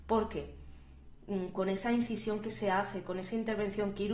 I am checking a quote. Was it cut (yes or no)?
no